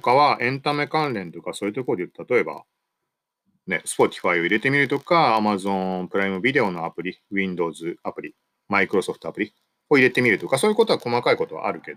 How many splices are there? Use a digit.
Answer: 0